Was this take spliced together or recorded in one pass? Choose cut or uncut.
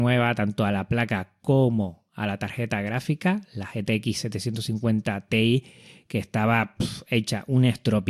uncut